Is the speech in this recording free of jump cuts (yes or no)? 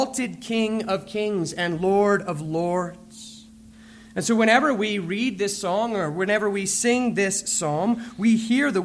yes